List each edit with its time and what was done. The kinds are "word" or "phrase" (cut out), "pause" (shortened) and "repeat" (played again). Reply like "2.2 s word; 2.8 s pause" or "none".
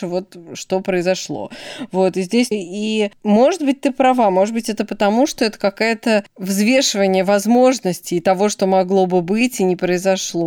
2.5 s word